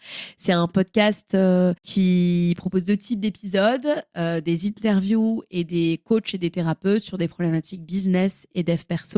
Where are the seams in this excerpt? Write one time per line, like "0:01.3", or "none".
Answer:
0:01.8